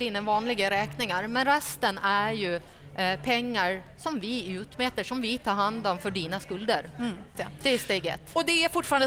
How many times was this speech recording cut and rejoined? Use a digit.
1